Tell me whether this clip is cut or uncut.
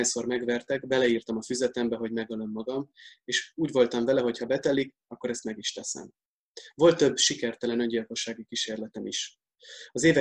uncut